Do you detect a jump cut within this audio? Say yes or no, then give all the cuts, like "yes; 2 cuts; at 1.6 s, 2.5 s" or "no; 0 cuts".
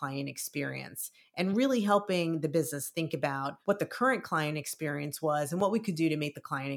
no; 0 cuts